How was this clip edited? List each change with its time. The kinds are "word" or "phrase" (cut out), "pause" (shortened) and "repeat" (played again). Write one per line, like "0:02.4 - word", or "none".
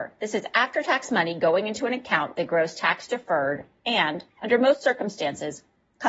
0:04.3 - pause